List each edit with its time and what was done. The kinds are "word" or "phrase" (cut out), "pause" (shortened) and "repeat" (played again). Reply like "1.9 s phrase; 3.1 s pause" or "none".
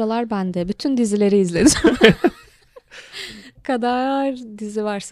3.5 s word